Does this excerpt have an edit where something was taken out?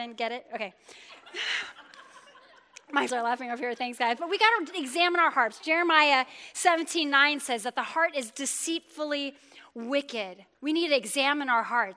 yes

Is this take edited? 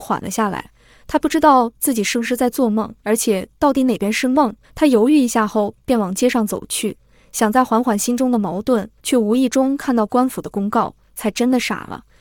yes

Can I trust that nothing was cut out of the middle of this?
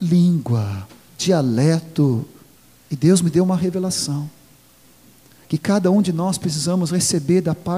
no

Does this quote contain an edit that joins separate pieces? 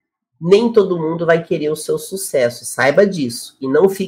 no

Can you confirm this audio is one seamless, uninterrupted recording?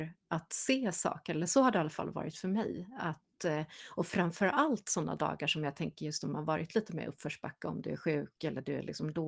yes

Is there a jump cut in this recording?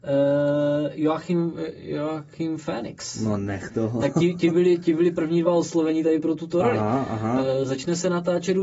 no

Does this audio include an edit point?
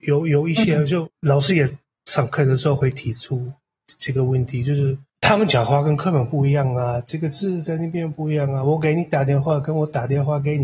yes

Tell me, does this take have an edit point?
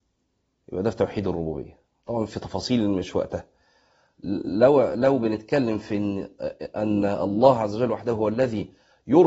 no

